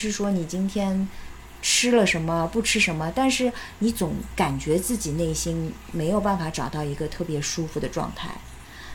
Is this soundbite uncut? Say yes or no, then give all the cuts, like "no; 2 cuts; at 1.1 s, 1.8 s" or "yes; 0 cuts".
yes; 0 cuts